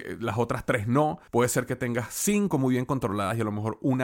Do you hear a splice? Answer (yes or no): yes